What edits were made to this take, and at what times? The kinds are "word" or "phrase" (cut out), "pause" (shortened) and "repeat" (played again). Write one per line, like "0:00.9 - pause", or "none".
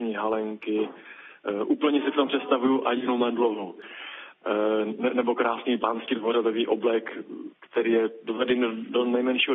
none